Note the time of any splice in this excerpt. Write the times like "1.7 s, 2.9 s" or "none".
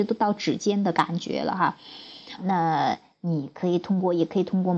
2.4 s